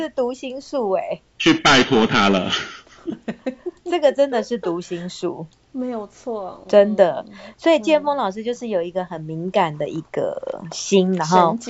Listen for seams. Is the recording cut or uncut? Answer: cut